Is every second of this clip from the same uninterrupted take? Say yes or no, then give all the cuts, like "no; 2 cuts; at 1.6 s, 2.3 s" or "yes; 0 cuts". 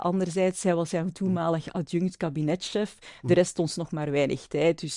yes; 0 cuts